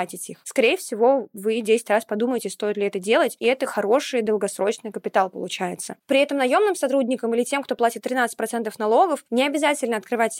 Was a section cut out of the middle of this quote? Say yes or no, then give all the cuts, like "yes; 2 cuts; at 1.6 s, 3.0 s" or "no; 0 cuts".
no; 0 cuts